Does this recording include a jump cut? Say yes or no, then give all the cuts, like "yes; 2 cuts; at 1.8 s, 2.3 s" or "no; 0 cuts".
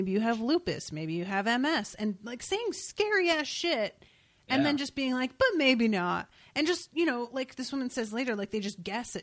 no; 0 cuts